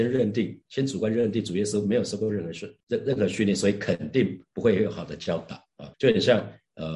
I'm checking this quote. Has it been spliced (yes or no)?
yes